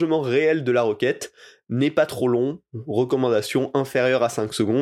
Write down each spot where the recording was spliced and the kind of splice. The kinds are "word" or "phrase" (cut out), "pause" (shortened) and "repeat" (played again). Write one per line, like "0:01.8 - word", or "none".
none